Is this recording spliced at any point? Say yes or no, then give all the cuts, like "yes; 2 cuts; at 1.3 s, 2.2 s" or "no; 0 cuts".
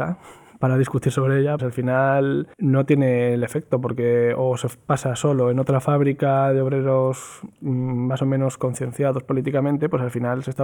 yes; 2 cuts; at 1.6 s, 2.5 s